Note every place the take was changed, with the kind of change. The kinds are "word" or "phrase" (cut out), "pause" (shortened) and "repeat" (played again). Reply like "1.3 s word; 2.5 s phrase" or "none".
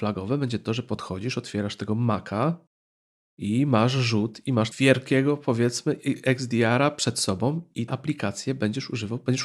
4.7 s word; 7.9 s word